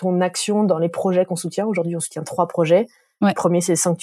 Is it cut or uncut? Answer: uncut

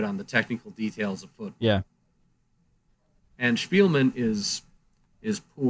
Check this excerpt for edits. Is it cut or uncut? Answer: cut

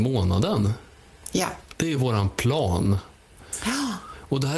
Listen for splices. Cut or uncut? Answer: uncut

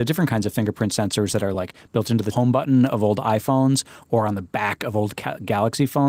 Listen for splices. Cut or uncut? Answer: uncut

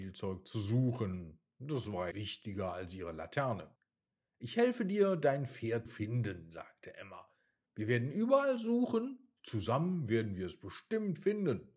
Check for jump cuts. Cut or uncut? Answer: cut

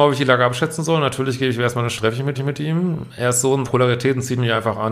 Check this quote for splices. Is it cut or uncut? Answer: cut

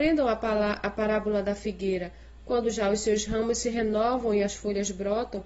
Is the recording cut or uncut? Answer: uncut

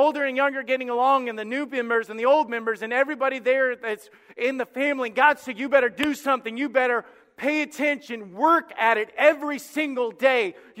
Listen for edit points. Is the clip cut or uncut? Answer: uncut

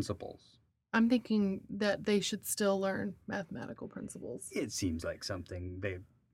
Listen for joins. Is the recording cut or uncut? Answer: uncut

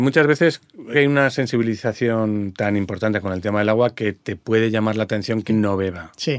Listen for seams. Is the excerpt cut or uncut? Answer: cut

